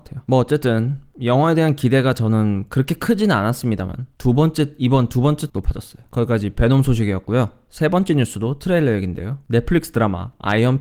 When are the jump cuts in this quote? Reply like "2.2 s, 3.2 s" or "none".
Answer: 5.5 s